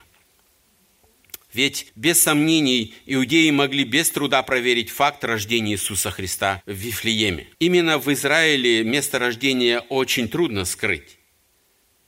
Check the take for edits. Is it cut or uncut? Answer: cut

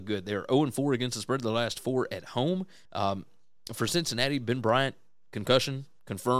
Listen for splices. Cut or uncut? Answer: cut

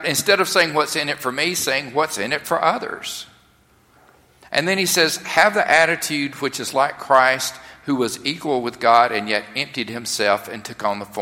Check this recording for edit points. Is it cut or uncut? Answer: uncut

